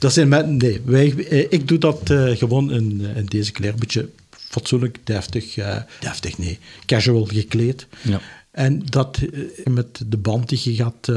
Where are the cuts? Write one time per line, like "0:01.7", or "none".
0:03.1
0:06.0
0:09.7